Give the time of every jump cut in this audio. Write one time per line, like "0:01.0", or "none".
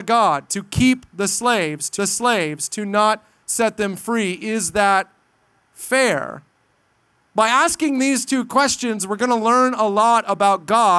0:02.0